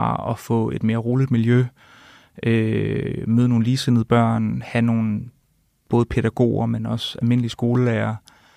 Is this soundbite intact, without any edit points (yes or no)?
yes